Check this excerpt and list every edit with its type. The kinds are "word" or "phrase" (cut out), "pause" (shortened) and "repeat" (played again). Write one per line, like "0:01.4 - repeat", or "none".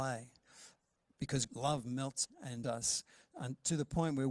0:01.5 - word
0:02.2 - word
0:02.6 - word